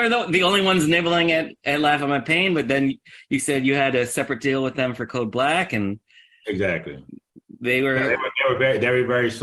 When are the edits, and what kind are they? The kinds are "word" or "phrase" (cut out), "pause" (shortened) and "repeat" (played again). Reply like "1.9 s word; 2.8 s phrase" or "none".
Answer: none

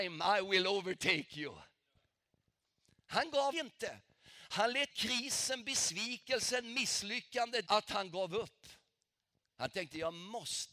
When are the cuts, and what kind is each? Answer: 3.5 s word; 4.9 s word; 7.7 s word

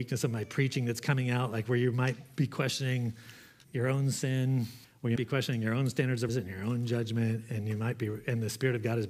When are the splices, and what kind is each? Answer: 3.6 s word; 4.8 s pause; 5.2 s word; 6.3 s word

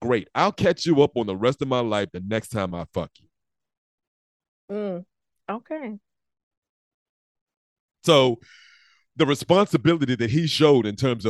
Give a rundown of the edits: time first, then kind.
none

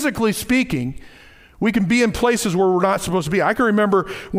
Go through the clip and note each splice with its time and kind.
none

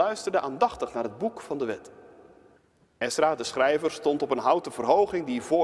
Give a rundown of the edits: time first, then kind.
2.6 s pause

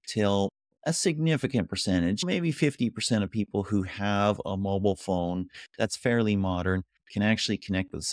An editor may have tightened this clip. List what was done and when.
none

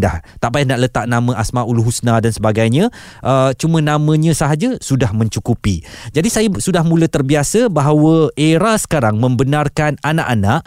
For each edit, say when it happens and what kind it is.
none

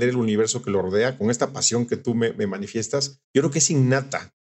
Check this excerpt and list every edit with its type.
3.2 s pause

